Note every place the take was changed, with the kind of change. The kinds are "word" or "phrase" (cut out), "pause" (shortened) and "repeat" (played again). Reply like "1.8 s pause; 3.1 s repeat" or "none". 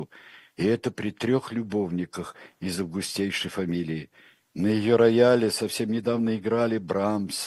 none